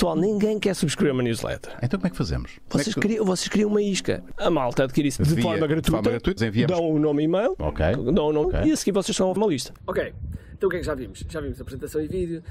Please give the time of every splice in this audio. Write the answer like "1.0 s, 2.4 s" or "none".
6.4 s, 8.4 s, 9.4 s